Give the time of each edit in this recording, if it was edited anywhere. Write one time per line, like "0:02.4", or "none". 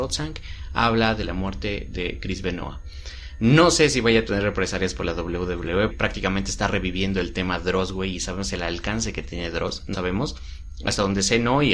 0:05.9
0:09.9